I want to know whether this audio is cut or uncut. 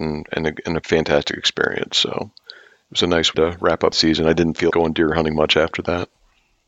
cut